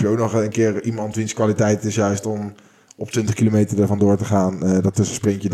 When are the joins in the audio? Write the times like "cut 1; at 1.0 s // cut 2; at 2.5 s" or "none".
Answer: none